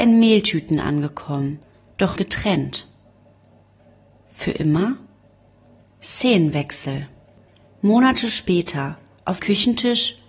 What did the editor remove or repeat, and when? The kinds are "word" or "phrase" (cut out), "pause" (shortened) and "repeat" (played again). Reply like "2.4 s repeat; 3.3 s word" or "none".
2.2 s word; 9.4 s word